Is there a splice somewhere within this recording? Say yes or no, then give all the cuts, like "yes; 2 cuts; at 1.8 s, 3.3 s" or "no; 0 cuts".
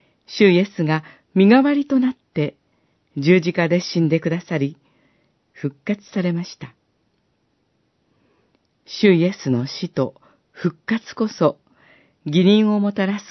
no; 0 cuts